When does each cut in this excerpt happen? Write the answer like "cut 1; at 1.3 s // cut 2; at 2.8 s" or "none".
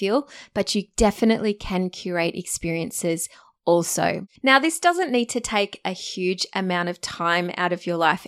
cut 1; at 4.4 s